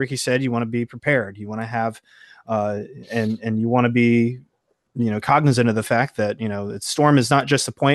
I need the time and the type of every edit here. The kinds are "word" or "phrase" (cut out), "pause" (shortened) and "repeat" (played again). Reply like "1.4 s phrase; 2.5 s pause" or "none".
none